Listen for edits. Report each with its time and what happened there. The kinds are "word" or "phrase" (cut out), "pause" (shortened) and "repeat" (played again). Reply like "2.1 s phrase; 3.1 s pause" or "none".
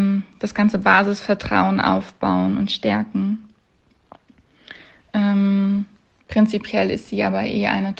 none